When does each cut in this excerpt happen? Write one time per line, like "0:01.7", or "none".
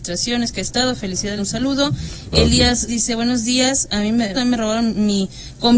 0:01.4
0:02.9
0:04.3